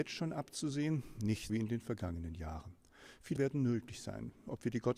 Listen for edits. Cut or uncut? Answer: cut